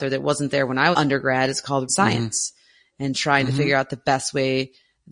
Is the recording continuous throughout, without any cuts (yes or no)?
no